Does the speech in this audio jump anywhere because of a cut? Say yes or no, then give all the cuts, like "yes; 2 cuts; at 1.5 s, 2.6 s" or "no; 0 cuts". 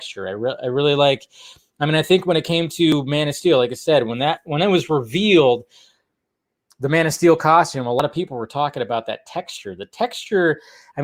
no; 0 cuts